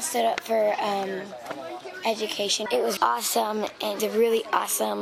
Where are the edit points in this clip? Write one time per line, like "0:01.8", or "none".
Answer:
0:02.7
0:03.0
0:04.0